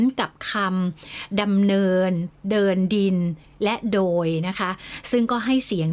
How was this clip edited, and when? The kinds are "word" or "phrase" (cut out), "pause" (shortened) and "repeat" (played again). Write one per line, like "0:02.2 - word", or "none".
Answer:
none